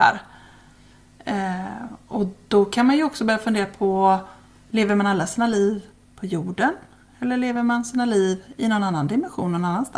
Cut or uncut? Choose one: uncut